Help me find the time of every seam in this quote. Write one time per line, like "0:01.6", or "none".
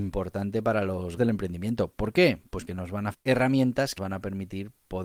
0:01.2
0:02.7
0:03.1
0:04.0